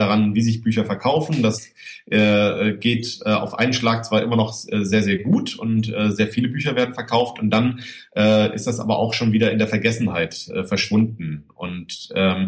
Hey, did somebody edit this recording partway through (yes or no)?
no